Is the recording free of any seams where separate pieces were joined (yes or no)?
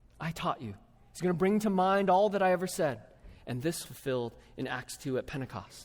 no